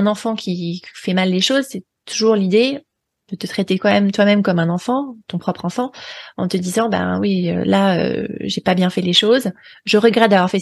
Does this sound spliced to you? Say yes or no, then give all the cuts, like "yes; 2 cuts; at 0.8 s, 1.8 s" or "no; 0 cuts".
no; 0 cuts